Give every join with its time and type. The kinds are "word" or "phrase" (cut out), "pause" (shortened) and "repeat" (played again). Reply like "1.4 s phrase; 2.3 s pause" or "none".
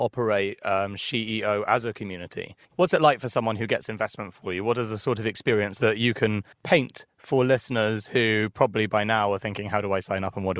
2.6 s pause; 6.5 s pause